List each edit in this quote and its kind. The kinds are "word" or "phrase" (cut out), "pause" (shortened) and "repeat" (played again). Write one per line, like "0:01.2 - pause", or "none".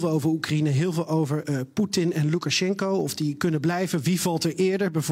none